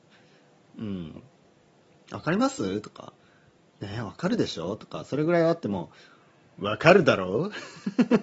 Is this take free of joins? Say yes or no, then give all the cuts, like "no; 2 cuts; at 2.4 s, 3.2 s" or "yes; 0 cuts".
yes; 0 cuts